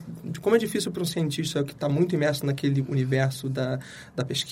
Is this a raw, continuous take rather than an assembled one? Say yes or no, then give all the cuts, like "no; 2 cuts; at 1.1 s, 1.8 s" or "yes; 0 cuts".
yes; 0 cuts